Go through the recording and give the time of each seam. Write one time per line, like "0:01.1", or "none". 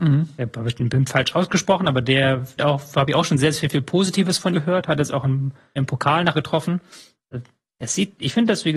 0:02.6
0:04.5
0:05.8
0:06.3